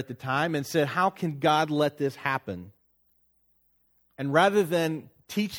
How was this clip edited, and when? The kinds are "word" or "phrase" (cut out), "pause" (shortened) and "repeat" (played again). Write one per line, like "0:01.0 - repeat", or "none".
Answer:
none